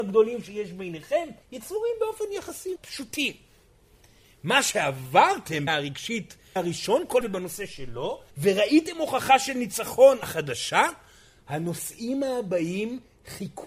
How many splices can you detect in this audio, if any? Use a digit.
7